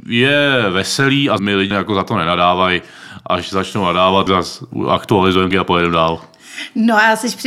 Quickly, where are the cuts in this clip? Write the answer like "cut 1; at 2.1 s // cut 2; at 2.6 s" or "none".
cut 1; at 1.4 s // cut 2; at 1.7 s // cut 3; at 4.3 s // cut 4; at 5.5 s